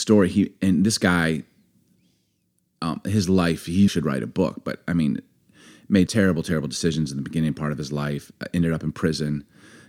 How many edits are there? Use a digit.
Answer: 2